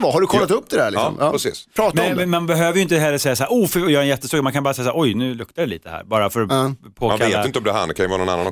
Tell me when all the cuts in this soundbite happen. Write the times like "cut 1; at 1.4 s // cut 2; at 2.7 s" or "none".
none

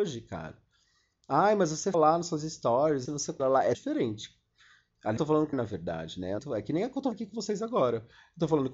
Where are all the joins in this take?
cut 1; at 1.9 s // cut 2; at 3.0 s // cut 3; at 3.4 s // cut 4; at 3.7 s // cut 5; at 5.2 s // cut 6; at 5.5 s // cut 7; at 6.4 s // cut 8; at 7.1 s

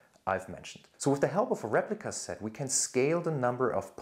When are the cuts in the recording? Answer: cut 1; at 0.9 s

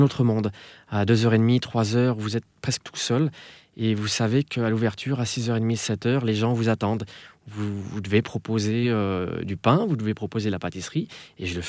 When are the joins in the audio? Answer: none

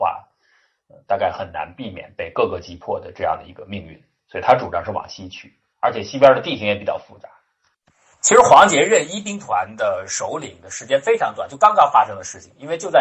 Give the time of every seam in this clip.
none

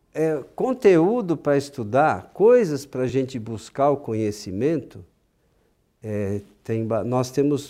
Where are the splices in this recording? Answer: none

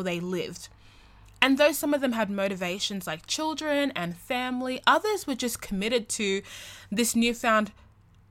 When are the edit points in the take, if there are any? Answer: none

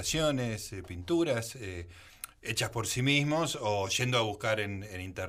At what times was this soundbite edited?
none

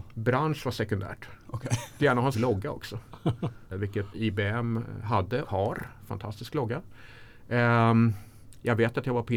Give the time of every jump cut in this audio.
cut 1; at 2.0 s // cut 2; at 2.3 s // cut 3; at 3.7 s // cut 4; at 4.1 s // cut 5; at 5.4 s

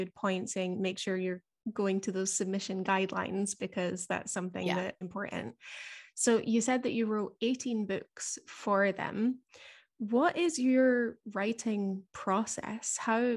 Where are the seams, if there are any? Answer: cut 1; at 5.0 s

